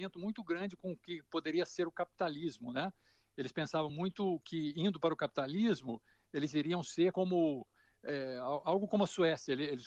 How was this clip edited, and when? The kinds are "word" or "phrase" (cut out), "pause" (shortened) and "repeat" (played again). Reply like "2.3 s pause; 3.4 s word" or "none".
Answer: none